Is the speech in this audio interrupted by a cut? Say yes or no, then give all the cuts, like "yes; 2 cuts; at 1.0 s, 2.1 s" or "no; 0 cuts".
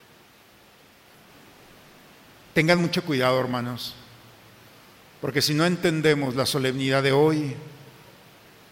no; 0 cuts